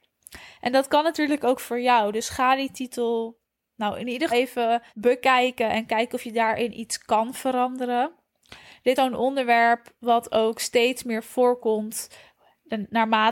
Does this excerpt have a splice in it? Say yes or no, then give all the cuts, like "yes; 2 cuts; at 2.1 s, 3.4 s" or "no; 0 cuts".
yes; 3 cuts; at 4.3 s, 4.9 s, 9.0 s